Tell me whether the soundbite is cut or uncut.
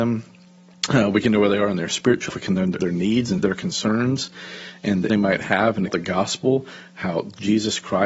cut